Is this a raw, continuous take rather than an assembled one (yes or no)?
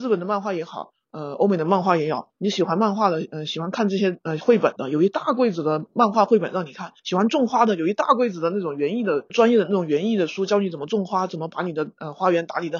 no